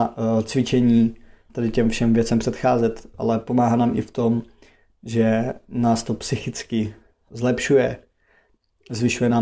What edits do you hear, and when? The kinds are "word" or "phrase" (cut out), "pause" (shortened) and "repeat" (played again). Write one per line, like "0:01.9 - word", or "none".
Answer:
0:01.5 - word
0:07.3 - word